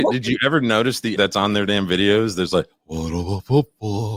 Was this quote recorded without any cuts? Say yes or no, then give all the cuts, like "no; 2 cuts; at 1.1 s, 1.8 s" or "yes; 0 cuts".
no; 1 cut; at 1.2 s